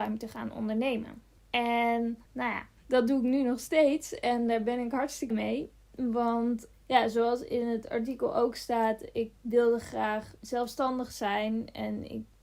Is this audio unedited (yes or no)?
no